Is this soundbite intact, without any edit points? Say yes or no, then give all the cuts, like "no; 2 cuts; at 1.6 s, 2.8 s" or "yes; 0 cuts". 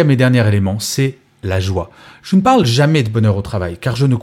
yes; 0 cuts